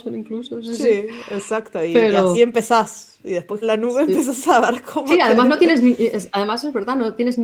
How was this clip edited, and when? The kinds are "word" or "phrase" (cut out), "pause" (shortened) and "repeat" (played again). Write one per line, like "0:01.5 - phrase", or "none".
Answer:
0:02.3 - word
0:03.6 - phrase